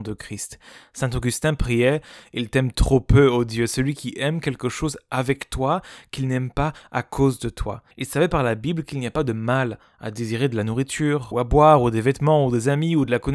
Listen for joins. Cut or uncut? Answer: cut